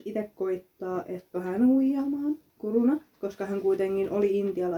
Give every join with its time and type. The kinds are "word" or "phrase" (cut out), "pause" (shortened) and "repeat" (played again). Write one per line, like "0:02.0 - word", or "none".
0:01.3 - word
0:02.5 - pause